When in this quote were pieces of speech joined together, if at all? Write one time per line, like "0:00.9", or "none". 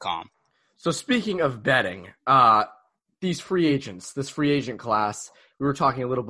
none